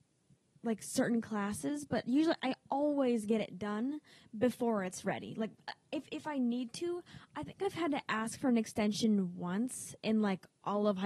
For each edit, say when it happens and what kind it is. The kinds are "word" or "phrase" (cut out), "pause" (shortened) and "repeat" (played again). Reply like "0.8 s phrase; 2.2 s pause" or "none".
none